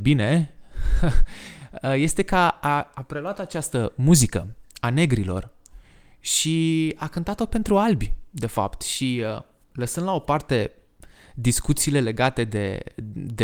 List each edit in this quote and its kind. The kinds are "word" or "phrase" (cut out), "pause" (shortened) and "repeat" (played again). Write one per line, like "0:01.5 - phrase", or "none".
none